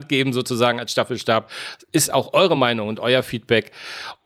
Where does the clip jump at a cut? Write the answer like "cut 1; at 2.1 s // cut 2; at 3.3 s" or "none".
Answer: none